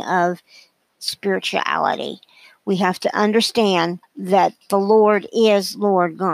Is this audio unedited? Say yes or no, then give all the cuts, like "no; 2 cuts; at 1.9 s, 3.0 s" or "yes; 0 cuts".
no; 1 cut; at 4.0 s